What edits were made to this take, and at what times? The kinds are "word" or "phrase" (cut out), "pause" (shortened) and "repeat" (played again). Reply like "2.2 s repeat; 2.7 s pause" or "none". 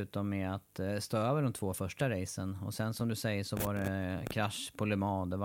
none